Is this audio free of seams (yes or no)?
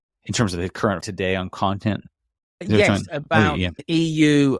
no